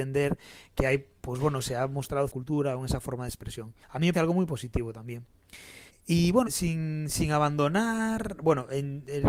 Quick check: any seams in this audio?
yes; 5 cuts; at 2.3 s, 3.8 s, 4.1 s, 5.9 s, 6.5 s

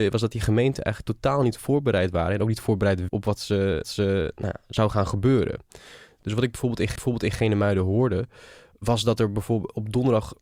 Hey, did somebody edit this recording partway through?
yes; 3 cuts; at 3.1 s, 3.8 s, 7.0 s

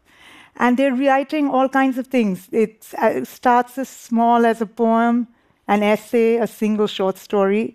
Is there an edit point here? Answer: no; 0 cuts

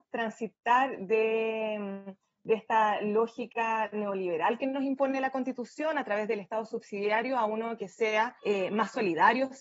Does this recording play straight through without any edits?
no; 1 cut; at 8.4 s

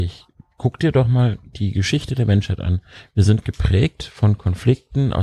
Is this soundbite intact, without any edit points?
yes; 0 cuts

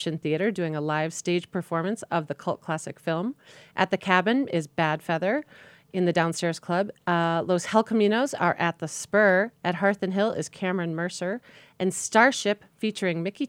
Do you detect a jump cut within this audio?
no; 0 cuts

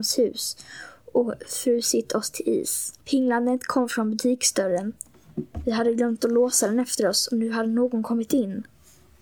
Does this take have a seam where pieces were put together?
yes; 1 cut; at 3.0 s

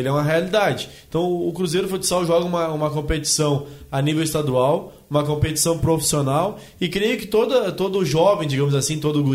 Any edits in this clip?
no; 0 cuts

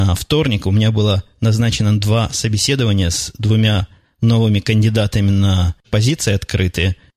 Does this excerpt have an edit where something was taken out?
yes; 1 cut; at 5.8 s

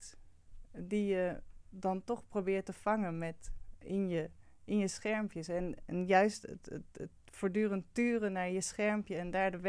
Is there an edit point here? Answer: no; 0 cuts

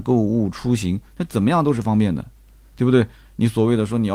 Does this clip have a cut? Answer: no; 0 cuts

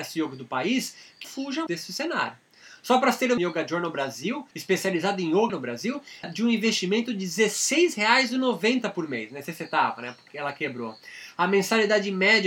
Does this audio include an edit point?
yes; 7 cuts; at 1.2 s, 1.7 s, 3.4 s, 4.5 s, 5.5 s, 6.2 s, 10.3 s

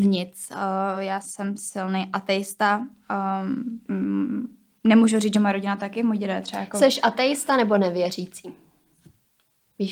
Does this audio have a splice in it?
no; 0 cuts

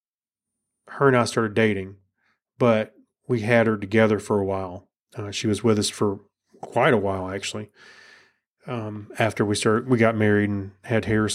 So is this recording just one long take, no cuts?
yes; 0 cuts

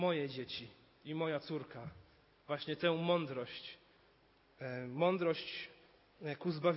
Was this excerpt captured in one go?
yes; 0 cuts

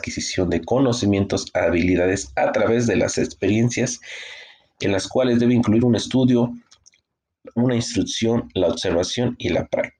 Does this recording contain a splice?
no; 0 cuts

